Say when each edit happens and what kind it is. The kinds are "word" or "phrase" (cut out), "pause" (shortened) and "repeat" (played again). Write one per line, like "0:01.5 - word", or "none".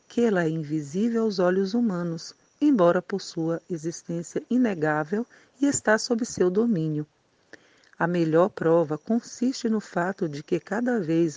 none